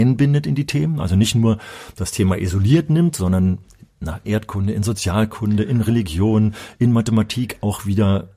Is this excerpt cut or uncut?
cut